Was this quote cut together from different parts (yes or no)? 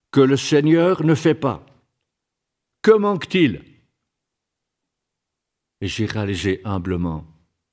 no